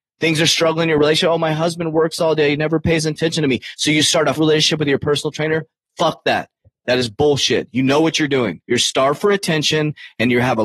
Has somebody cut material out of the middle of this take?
yes; 2 cuts; at 4.4 s, 8.6 s

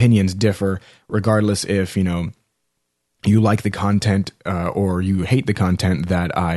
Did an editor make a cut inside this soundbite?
no; 0 cuts

